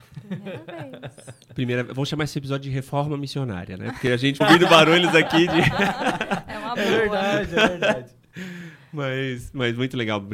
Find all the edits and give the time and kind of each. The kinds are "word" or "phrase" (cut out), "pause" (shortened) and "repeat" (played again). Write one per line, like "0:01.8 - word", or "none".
0:04.4 - word

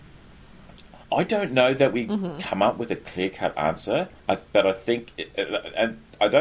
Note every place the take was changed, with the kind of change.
0:01.0 - pause
0:04.2 - pause

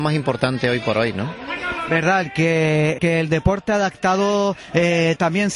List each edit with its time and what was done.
0:03.0 - word

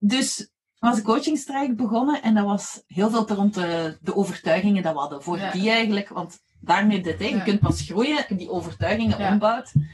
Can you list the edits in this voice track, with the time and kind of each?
0:01.0 - word
0:02.9 - word
0:03.3 - word
0:07.0 - word
0:08.3 - word

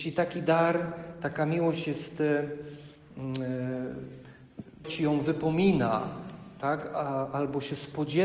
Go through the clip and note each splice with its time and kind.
0:04.8 - word

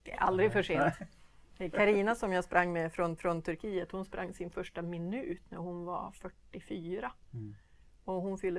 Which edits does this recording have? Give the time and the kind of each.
0:03.2 - repeat

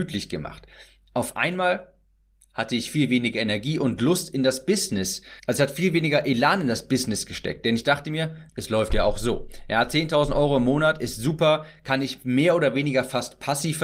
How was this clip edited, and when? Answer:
0:05.4 - pause
0:08.5 - pause

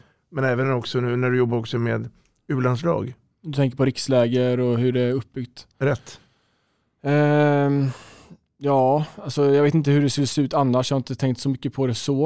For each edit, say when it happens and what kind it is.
none

